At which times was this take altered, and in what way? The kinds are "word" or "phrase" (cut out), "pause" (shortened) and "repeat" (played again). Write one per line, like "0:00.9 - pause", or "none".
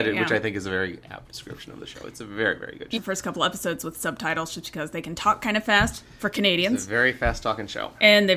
0:03.0 - phrase